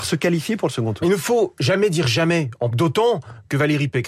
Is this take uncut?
no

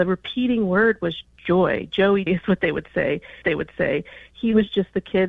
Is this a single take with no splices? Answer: no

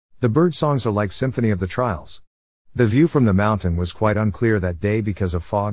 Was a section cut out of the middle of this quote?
no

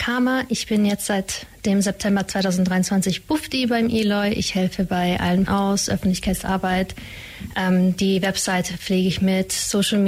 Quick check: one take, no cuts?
no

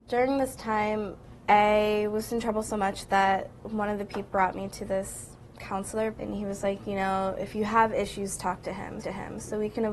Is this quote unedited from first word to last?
no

